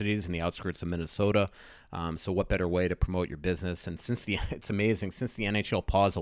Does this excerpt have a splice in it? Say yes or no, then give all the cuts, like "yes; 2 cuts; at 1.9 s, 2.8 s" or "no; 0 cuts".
no; 0 cuts